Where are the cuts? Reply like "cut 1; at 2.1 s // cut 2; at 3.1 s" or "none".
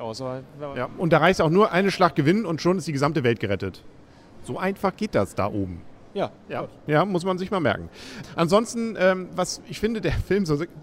none